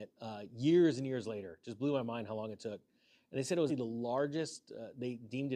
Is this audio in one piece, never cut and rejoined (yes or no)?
no